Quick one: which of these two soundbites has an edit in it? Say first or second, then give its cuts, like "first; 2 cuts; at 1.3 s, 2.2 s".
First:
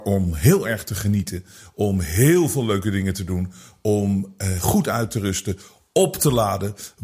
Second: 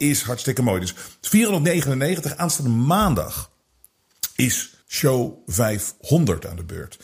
second; 1 cut; at 4.8 s